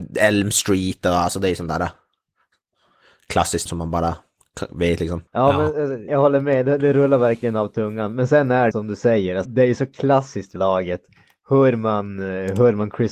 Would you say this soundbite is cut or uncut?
cut